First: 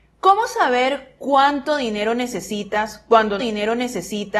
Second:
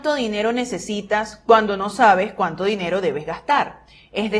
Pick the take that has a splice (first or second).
first